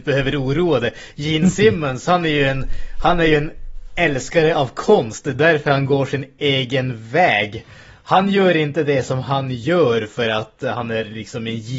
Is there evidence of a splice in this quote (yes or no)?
no